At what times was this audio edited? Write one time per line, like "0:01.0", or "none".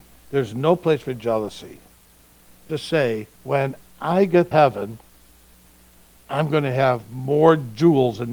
0:02.7
0:03.3
0:04.5